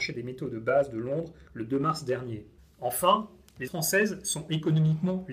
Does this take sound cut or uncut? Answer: cut